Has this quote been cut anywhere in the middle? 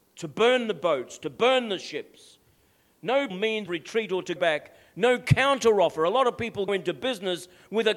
yes; 4 cuts; at 3.3 s, 3.7 s, 4.4 s, 6.7 s

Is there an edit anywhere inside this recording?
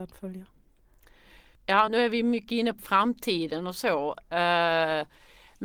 yes; 2 cuts; at 1.9 s, 2.8 s

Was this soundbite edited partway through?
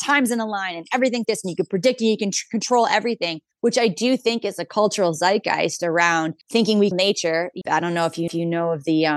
yes; 6 cuts; at 1.2 s, 3.5 s, 6.4 s, 6.9 s, 7.6 s, 8.3 s

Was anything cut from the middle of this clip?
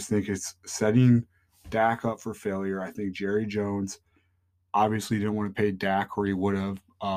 no; 0 cuts

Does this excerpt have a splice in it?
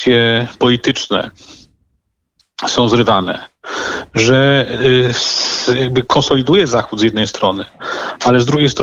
no; 0 cuts

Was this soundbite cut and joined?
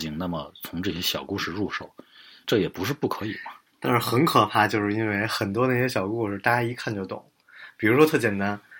yes; 2 cuts; at 2.4 s, 3.7 s

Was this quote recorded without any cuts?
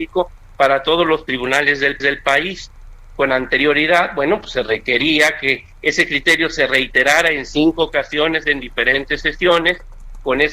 no; 1 cut; at 2.0 s

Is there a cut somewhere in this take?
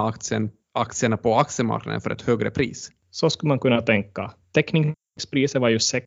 no; 0 cuts

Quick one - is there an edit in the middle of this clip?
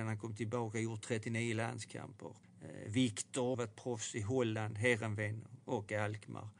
yes; 2 cuts; at 2.4 s, 3.5 s

